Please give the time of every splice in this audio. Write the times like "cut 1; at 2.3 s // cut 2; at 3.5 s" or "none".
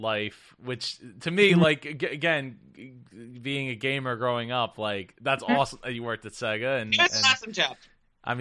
none